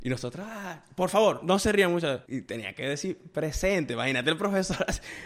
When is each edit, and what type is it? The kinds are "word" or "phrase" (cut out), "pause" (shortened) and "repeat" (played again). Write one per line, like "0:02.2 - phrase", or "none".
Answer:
0:01.4 - word
0:02.2 - pause